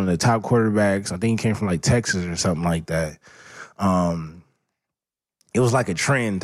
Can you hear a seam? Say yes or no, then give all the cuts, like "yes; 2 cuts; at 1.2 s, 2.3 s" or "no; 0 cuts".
no; 0 cuts